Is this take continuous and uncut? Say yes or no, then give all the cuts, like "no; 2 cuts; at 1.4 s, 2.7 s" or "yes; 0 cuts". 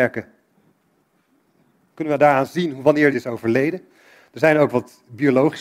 no; 1 cut; at 3.1 s